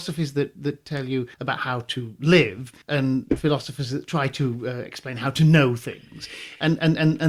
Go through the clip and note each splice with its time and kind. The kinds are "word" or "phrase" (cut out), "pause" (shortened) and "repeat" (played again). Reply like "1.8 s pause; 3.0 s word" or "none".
1.3 s pause; 2.8 s pause